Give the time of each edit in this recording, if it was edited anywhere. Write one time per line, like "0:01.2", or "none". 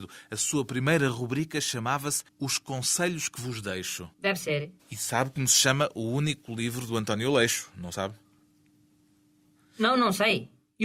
0:02.3
0:04.1
0:04.8